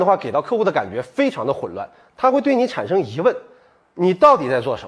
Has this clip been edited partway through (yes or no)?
no